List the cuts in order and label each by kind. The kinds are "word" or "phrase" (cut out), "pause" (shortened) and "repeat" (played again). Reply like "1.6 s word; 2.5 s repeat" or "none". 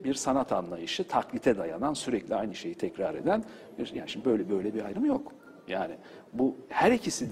none